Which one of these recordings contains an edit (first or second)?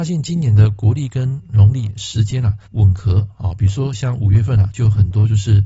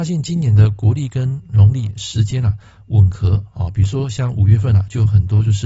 first